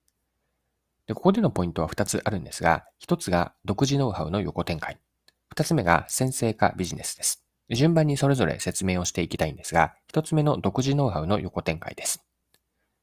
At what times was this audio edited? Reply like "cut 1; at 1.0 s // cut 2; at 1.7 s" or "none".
cut 1; at 7.5 s